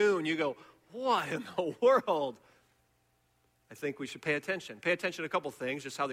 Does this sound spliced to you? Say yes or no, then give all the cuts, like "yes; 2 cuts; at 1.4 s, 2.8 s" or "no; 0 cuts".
no; 0 cuts